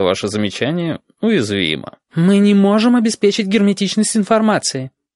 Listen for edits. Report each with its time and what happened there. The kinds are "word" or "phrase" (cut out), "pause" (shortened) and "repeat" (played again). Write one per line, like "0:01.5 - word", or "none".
0:02.0 - pause